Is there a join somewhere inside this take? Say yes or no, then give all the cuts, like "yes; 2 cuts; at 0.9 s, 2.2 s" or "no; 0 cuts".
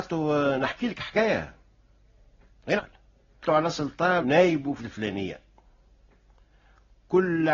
yes; 4 cuts; at 2.8 s, 3.4 s, 4.2 s, 4.8 s